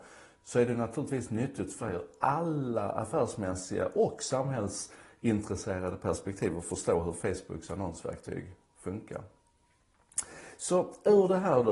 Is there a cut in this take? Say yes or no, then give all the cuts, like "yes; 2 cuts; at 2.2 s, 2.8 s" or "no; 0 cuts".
no; 0 cuts